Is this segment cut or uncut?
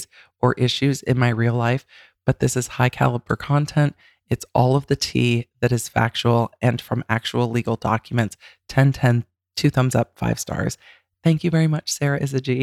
uncut